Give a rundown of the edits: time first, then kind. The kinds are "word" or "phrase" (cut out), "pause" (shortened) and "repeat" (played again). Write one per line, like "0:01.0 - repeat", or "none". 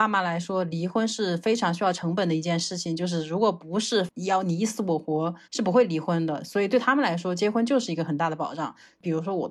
0:05.4 - pause